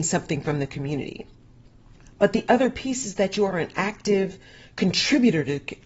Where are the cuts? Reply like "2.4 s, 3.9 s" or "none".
none